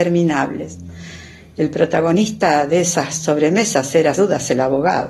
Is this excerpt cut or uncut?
cut